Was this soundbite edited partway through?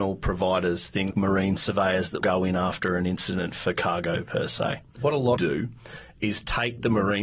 yes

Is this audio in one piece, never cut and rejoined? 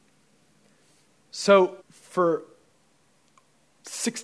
no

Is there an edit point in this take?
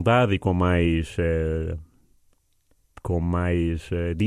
no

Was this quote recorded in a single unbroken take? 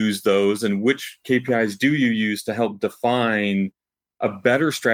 yes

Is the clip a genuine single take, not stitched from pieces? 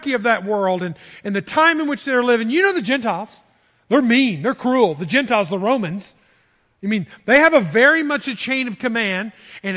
yes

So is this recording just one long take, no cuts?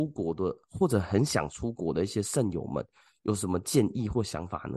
yes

